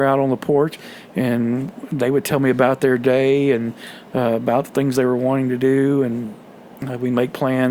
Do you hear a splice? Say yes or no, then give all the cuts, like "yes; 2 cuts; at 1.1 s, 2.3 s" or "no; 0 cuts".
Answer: no; 0 cuts